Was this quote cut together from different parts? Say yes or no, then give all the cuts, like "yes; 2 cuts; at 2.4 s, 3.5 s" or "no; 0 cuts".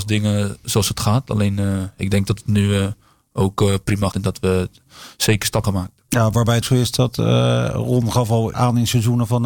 yes; 5 cuts; at 2.0 s, 4.1 s, 5.6 s, 6.6 s, 8.5 s